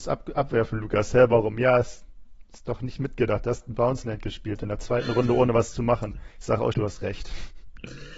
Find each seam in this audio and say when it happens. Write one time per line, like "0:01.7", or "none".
0:06.3
0:06.7